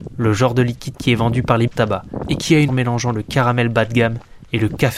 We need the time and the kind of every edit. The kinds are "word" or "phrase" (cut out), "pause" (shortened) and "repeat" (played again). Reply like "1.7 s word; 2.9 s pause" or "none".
1.7 s word; 2.7 s word

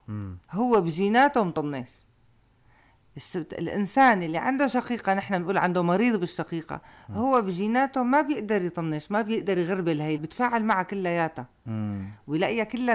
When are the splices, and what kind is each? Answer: 10.2 s word

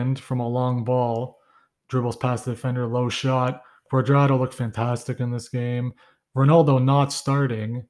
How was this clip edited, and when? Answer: none

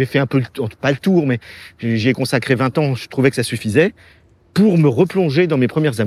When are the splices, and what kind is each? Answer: none

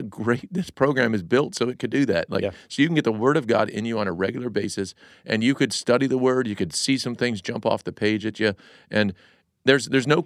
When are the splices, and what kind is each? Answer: none

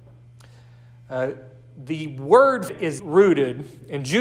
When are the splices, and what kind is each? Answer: 2.7 s word; 3.0 s word

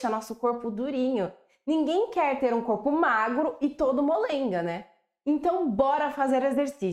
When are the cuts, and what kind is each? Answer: none

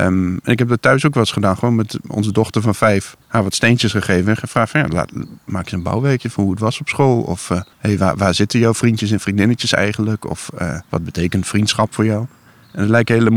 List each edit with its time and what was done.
3.2 s pause; 7.7 s pause; 10.8 s pause

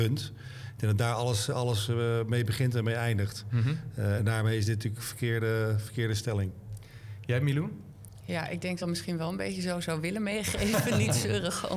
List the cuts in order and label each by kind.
5.0 s phrase; 8.8 s phrase

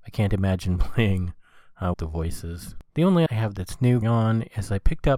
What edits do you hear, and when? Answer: 1.9 s word; 2.9 s pause; 3.3 s phrase; 4.0 s word

